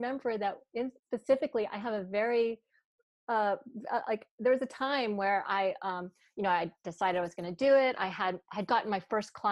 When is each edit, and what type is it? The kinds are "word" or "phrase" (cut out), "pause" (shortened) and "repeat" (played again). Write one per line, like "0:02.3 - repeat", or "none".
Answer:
0:01.0 - pause